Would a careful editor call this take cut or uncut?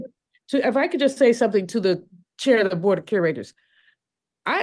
uncut